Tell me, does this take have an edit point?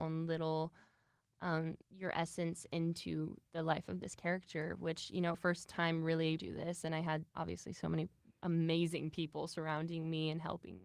yes; 4 cuts; at 1.8 s, 5.3 s, 6.4 s, 7.3 s

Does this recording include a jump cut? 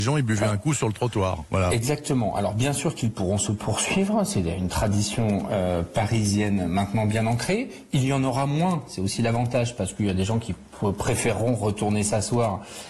no; 0 cuts

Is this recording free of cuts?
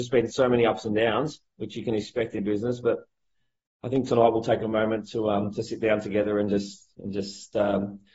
no; 1 cut; at 2.4 s

